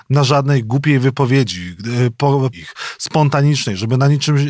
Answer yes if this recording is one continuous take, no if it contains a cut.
no